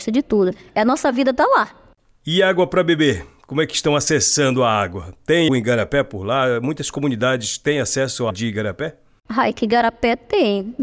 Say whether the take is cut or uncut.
cut